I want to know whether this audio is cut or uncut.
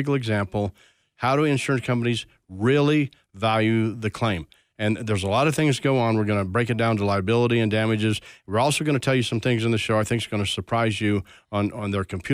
uncut